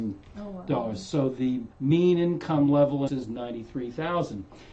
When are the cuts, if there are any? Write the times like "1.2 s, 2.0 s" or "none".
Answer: 1.7 s, 3.1 s